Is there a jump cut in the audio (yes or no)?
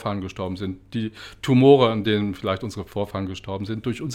no